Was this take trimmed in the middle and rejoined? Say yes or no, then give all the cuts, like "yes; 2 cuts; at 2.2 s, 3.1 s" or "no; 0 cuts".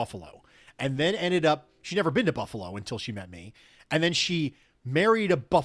no; 0 cuts